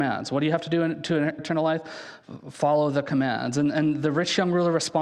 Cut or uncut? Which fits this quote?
cut